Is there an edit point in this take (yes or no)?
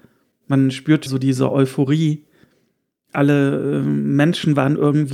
yes